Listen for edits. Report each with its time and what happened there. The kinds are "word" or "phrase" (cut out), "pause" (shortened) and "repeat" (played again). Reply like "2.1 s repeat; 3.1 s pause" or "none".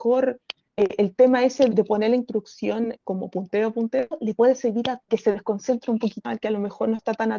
1.7 s word; 3.0 s word; 5.1 s phrase; 6.2 s word